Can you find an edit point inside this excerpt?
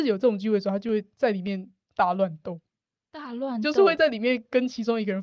no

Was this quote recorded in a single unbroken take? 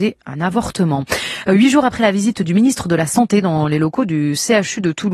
yes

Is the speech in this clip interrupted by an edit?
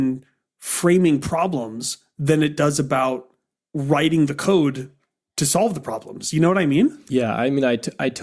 no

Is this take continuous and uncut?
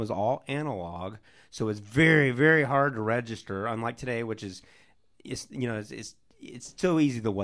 yes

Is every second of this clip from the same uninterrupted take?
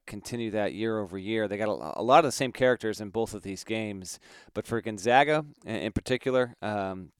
yes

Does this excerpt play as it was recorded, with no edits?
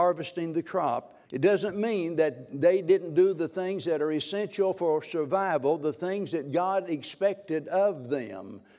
no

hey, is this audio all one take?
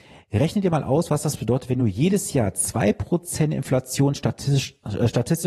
yes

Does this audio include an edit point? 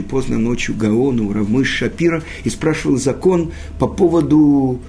no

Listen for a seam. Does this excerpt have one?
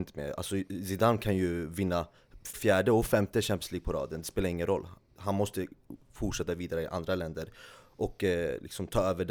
yes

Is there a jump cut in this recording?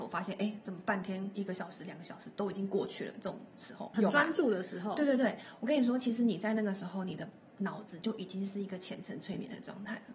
yes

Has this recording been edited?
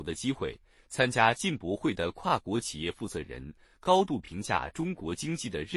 no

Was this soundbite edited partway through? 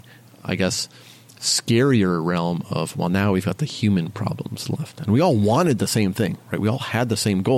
no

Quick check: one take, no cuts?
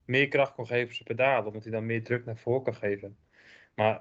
yes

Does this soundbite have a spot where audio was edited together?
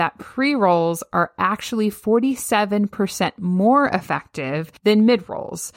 yes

